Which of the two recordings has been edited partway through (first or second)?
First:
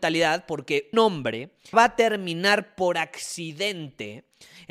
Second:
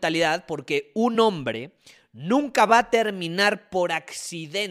first